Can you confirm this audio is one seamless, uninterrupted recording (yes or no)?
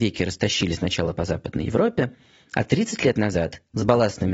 yes